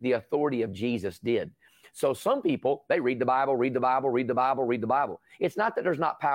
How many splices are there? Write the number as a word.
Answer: zero